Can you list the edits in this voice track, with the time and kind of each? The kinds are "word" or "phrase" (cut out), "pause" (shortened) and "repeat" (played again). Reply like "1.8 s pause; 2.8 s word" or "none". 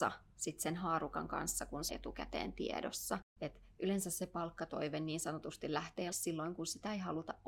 1.9 s word; 3.3 s pause; 6.1 s word